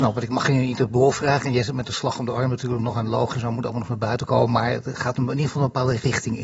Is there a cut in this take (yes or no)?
no